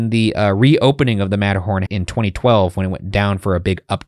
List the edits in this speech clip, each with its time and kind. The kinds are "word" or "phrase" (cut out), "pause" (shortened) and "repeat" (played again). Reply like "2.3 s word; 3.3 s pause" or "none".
1.9 s word